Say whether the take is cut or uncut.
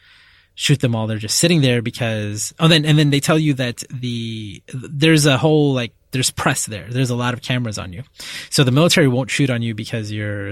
uncut